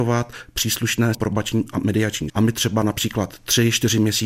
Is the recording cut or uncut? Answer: cut